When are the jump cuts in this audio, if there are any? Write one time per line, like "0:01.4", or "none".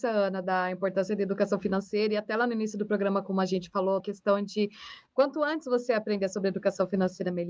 0:04.0